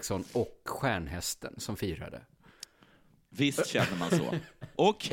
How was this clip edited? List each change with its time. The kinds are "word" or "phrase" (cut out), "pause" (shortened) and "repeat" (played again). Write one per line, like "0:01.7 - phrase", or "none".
none

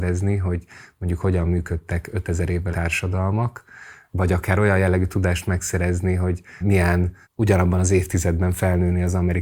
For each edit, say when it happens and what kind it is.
0:02.7 - word
0:06.6 - word
0:07.2 - pause

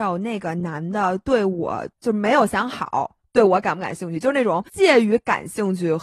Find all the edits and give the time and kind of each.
0:01.9 - pause
0:04.7 - pause

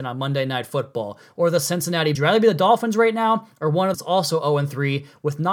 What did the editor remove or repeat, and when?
0:02.1 - phrase
0:03.9 - phrase

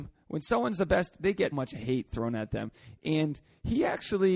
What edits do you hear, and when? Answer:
0:01.5 - word

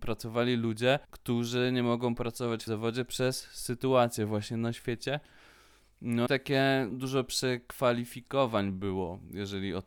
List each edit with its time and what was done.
0:01.0 - pause
0:02.7 - word
0:06.3 - word
0:06.9 - word

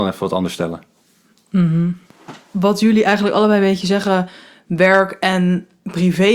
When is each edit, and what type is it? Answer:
none

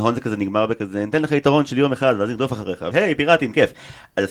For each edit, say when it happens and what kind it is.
0:02.9 - word

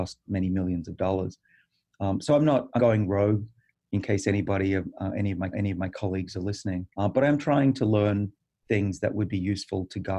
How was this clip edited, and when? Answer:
0:02.8 - word
0:05.5 - repeat
0:06.9 - pause

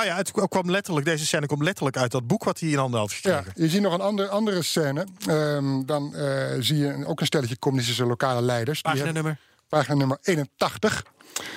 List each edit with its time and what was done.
none

